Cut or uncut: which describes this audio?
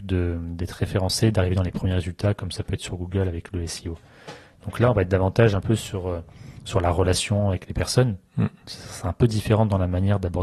uncut